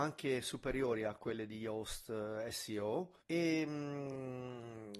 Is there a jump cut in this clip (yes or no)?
yes